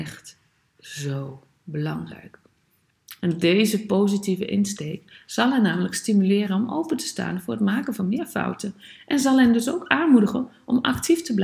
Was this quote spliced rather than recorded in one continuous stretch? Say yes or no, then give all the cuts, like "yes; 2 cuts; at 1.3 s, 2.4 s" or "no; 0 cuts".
no; 0 cuts